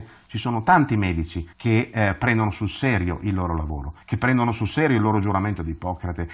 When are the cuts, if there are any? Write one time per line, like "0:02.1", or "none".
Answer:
0:01.5
0:04.0